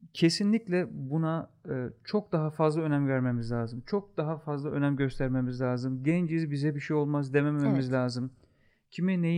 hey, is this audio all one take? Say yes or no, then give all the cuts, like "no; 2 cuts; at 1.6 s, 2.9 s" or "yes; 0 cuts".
yes; 0 cuts